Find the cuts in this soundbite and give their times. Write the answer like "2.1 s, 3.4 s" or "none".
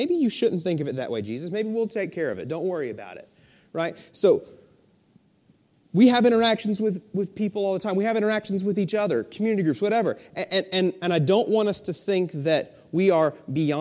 none